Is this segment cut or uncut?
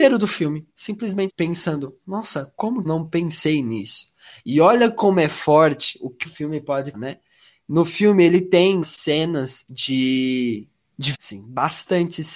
cut